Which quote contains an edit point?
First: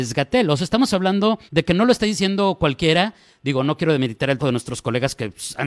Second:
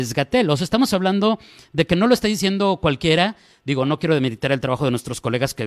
first; 2 cuts; at 1.5 s, 4.4 s

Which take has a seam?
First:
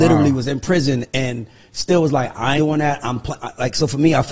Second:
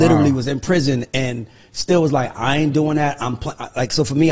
first; 1 cut; at 2.6 s

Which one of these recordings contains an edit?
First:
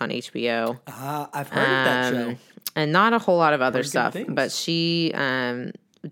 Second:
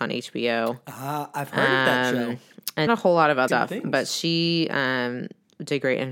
second; 2 cuts; at 2.9 s, 3.5 s

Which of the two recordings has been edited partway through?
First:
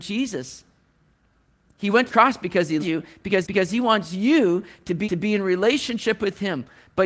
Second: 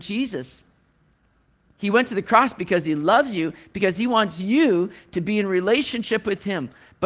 first; 4 cuts; at 2.1 s, 2.8 s, 3.4 s, 5.0 s

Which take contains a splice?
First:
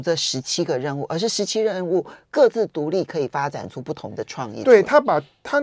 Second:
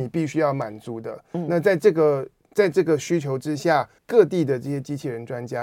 second; 1 cut; at 4.0 s

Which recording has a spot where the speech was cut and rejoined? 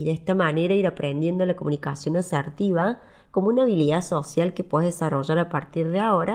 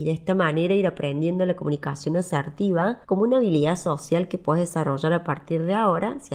second; 1 cut; at 3.0 s

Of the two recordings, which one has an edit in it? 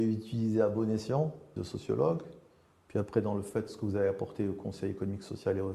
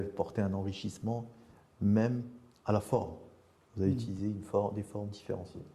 first; 1 cut; at 1.6 s

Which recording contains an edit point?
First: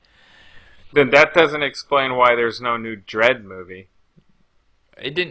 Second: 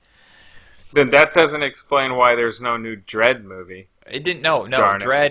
second; 1 cut; at 4.0 s

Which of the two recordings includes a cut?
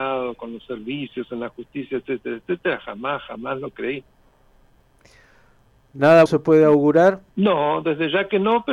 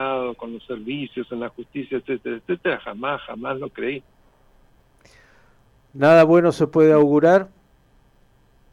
first; 2 cuts; at 6.3 s, 7.3 s

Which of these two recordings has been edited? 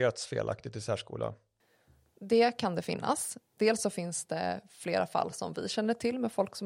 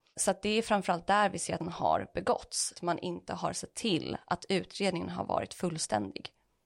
second; 2 cuts; at 1.6 s, 2.8 s

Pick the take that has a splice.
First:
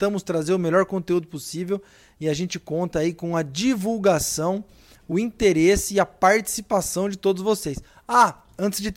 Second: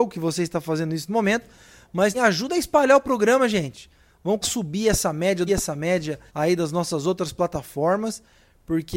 second; 5 cuts; at 1.1 s, 2.1 s, 4.4 s, 5.5 s, 6.3 s

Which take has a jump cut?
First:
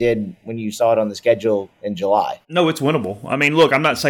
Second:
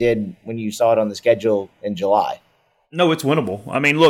first; 1 cut; at 2.4 s

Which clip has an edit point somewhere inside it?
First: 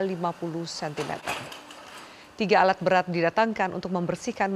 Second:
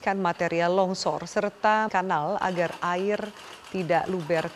second; 1 cut; at 1.9 s

